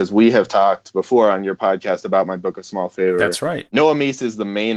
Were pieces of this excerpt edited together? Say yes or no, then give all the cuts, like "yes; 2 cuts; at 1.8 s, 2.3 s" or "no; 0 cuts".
no; 0 cuts